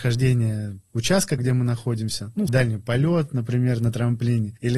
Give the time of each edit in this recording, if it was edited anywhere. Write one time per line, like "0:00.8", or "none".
0:01.4
0:02.5